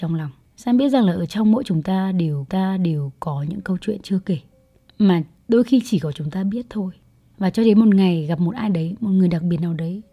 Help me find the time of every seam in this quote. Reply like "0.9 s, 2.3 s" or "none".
2.5 s